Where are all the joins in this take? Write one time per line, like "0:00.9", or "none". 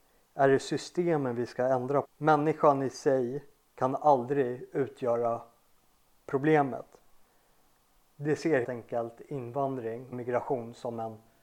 0:02.0
0:08.6
0:10.1